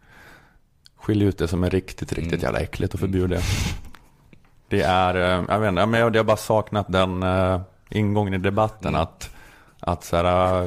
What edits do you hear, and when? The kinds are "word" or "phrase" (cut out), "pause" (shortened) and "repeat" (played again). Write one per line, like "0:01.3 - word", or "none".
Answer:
none

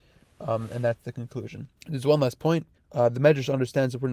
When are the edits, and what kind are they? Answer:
0:01.8 - pause
0:02.8 - pause

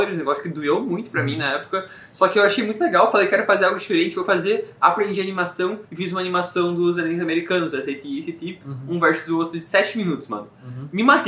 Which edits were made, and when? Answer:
0:05.8 - pause

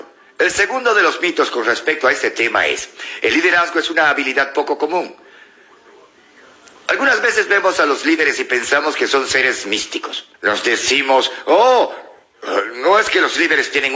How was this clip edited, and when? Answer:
0:10.3 - pause

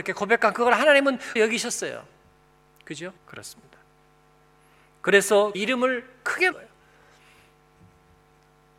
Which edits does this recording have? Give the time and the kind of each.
0:01.4 - word
0:03.2 - pause
0:05.5 - word
0:06.5 - word

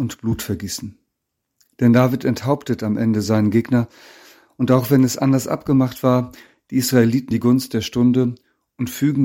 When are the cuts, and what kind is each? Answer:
0:07.3 - word

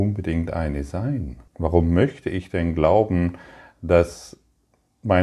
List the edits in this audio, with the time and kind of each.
0:01.5 - pause

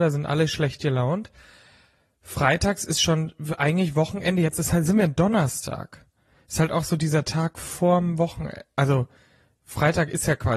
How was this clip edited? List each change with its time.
none

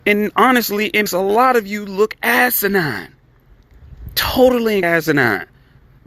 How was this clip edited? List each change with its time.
0:01.1 - word
0:04.8 - word

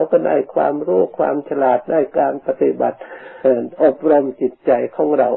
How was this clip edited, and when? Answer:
0:03.4 - pause

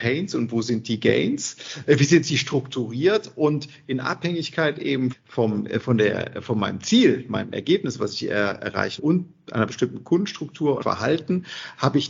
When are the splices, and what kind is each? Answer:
0:05.1 - word
0:09.0 - word
0:10.8 - word

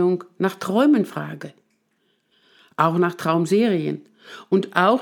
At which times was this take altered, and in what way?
none

